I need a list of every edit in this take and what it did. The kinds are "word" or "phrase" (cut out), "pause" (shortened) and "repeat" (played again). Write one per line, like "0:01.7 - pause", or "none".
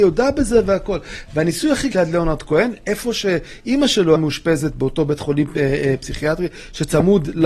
0:01.9 - phrase
0:04.2 - word